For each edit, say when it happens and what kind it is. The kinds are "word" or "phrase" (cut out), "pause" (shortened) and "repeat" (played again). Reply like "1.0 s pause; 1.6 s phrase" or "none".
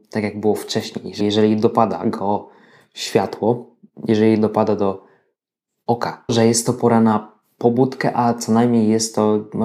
1.2 s word; 6.3 s phrase